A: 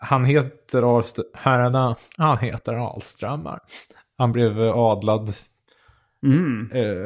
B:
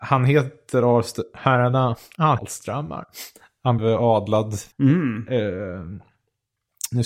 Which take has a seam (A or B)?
B